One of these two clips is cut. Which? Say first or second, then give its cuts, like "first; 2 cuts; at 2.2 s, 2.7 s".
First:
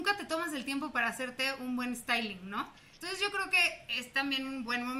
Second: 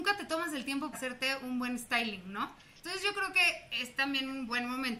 second; 1 cut; at 0.9 s